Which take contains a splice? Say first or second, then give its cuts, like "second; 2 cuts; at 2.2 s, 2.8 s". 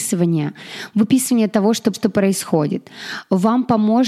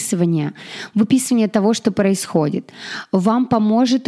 first; 1 cut; at 1.9 s